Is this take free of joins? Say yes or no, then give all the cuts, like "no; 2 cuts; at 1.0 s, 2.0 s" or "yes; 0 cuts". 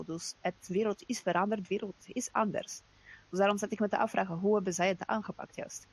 yes; 0 cuts